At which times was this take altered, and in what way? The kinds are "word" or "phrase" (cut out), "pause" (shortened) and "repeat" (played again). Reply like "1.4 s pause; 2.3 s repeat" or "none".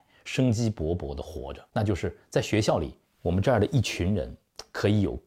1.7 s pause; 3.1 s pause